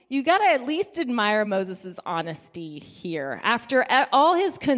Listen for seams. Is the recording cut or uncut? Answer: uncut